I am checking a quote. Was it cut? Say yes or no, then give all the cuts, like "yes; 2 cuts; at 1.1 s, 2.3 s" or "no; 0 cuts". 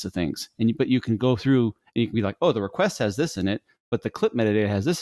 no; 0 cuts